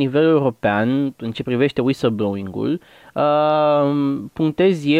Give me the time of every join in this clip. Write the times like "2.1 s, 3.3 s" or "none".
1.3 s